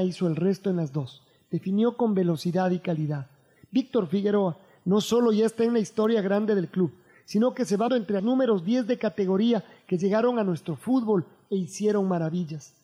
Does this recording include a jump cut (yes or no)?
yes